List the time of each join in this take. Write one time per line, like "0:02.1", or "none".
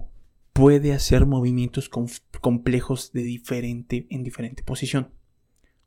none